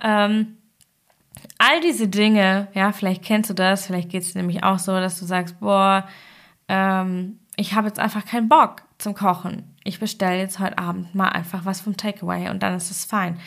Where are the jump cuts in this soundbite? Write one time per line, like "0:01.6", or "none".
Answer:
none